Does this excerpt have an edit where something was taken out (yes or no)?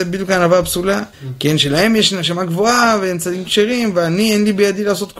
yes